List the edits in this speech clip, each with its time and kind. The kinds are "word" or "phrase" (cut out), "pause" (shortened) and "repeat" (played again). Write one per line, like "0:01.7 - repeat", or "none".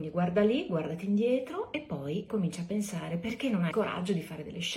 0:02.3 - word
0:03.7 - word